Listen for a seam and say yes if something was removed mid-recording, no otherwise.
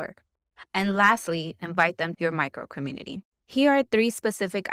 yes